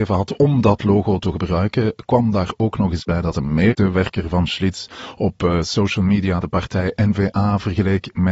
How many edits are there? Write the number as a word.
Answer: zero